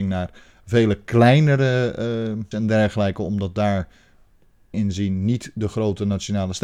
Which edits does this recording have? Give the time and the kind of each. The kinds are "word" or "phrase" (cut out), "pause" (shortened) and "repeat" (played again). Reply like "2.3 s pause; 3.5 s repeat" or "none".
2.5 s word; 4.7 s word